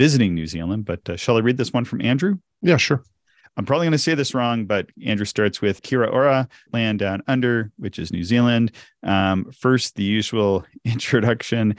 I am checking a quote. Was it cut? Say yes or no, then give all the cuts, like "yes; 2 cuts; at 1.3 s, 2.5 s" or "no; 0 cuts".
yes; 2 cuts; at 5.8 s, 6.7 s